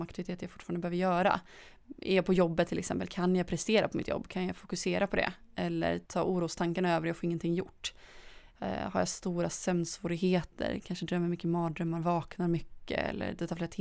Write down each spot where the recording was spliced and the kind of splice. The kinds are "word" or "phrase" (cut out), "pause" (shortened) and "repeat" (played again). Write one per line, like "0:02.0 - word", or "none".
0:06.1 - pause